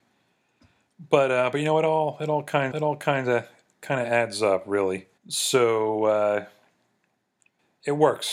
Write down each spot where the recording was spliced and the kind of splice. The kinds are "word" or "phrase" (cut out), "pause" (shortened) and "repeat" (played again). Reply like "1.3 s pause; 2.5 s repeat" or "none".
2.7 s repeat; 5.2 s pause